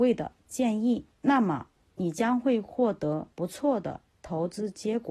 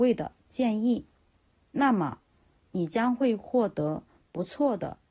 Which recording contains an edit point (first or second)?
first